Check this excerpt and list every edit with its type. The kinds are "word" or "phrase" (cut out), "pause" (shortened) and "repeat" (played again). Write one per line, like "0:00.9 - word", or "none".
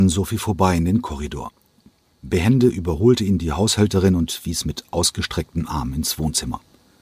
none